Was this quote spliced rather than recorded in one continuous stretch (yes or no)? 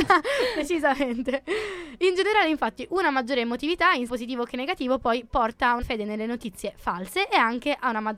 yes